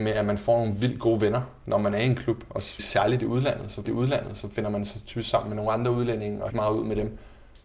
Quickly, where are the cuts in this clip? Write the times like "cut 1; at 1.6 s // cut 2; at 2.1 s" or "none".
cut 1; at 2.8 s // cut 2; at 3.8 s // cut 3; at 6.5 s